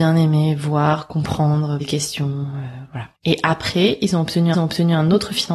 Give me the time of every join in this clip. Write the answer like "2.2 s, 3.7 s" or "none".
1.8 s, 3.1 s, 4.5 s